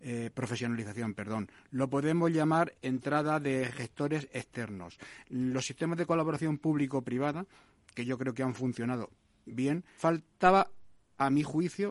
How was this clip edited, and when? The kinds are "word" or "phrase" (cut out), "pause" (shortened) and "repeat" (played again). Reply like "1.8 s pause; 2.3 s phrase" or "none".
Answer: 2.7 s word; 10.0 s word